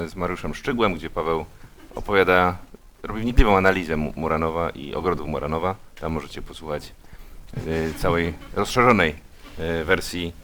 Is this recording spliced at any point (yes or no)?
no